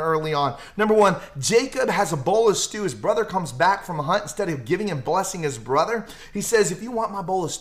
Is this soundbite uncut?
yes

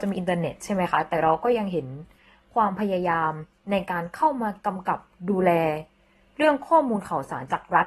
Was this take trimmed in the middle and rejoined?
no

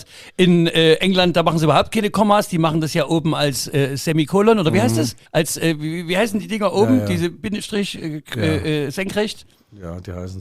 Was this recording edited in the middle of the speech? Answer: yes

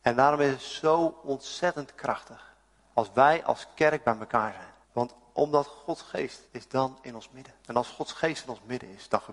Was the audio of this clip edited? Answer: yes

